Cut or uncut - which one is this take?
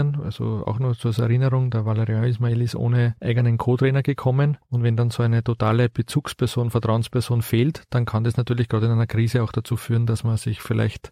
uncut